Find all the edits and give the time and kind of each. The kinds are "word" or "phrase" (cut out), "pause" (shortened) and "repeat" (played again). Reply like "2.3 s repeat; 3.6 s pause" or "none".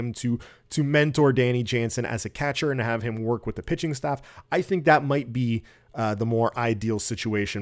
none